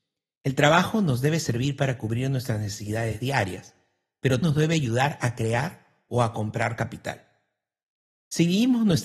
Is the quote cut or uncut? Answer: cut